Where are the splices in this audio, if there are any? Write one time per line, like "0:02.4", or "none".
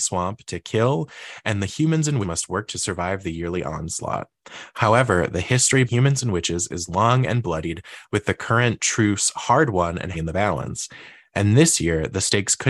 0:02.2
0:02.7
0:05.9
0:10.1